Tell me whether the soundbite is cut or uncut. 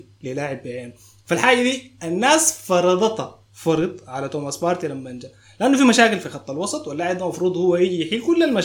uncut